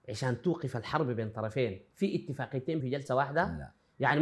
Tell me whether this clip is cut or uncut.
cut